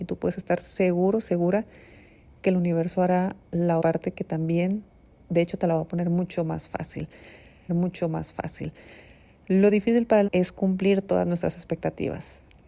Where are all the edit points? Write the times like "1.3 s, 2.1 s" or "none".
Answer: 3.8 s, 7.7 s, 10.3 s